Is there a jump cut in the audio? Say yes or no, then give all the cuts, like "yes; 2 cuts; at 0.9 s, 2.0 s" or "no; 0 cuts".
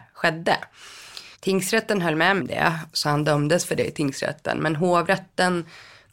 yes; 2 cuts; at 1.3 s, 2.4 s